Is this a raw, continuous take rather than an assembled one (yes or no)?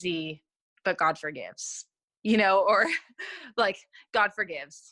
yes